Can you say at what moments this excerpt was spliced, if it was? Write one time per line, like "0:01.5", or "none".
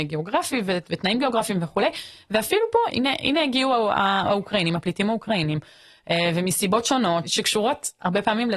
0:02.9